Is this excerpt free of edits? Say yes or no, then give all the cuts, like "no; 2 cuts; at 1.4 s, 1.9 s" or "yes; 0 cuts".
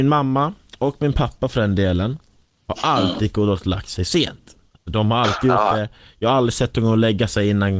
yes; 0 cuts